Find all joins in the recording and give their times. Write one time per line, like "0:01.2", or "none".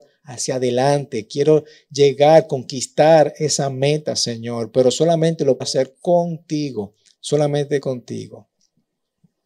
0:05.6